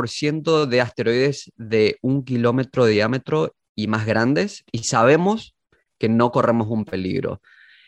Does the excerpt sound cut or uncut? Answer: uncut